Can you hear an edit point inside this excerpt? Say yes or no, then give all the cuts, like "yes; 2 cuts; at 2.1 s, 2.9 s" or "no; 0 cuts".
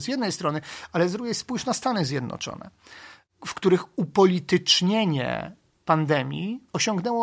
no; 0 cuts